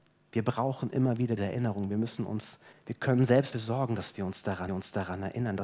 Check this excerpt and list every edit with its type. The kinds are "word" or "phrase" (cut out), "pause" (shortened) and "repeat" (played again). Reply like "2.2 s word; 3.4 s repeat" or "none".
1.4 s word; 2.7 s pause; 3.5 s word; 4.7 s repeat